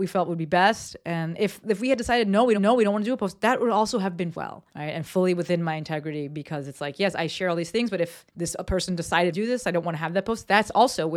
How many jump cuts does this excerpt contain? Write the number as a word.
five